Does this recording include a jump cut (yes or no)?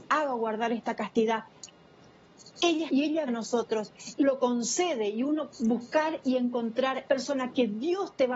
yes